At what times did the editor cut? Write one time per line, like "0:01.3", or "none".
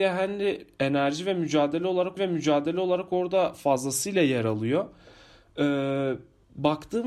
0:02.2